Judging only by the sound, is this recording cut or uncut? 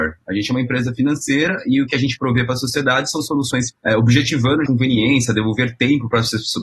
cut